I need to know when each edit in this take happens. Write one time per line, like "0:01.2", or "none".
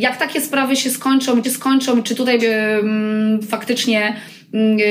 0:01.4
0:02.4